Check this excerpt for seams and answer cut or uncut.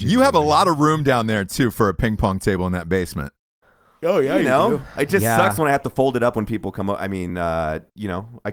uncut